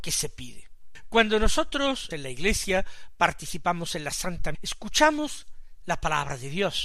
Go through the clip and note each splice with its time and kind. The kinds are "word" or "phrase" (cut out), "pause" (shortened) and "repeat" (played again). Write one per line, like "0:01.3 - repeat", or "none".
0:02.1 - word
0:04.5 - word
0:05.8 - word